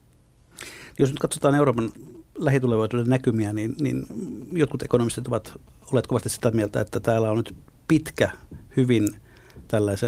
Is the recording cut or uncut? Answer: uncut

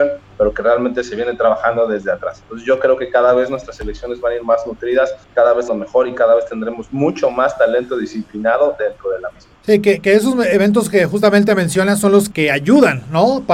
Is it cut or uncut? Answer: cut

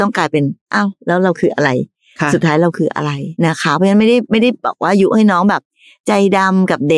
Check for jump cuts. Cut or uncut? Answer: cut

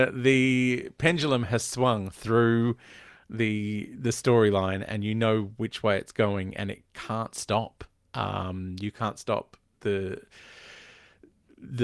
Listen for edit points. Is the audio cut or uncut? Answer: uncut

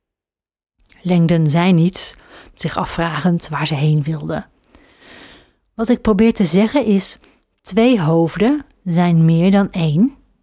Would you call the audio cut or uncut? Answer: uncut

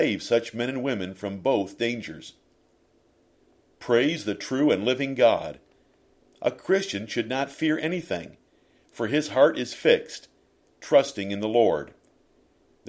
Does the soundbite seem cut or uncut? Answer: uncut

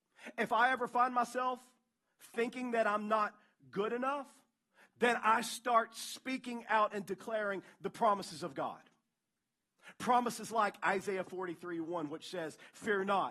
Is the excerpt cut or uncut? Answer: uncut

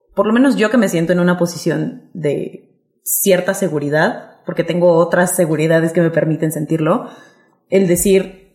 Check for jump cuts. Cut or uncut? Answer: cut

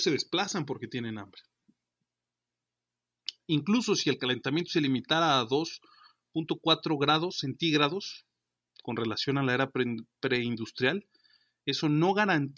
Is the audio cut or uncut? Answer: uncut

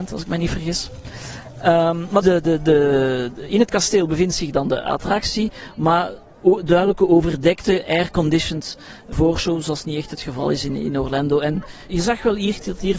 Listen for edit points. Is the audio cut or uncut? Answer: cut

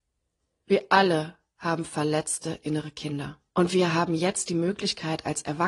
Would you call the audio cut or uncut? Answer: cut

